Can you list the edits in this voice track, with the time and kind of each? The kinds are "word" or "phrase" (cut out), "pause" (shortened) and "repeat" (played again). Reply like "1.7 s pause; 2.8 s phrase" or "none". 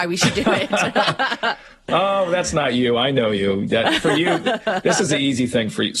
none